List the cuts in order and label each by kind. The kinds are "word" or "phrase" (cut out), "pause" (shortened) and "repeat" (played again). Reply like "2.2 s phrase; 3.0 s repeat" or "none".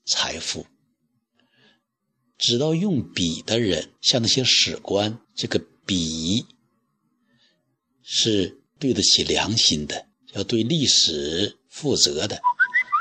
4.0 s pause; 5.2 s pause; 8.7 s pause; 10.1 s pause

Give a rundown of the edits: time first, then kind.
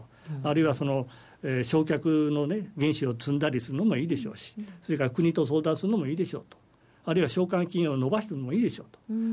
none

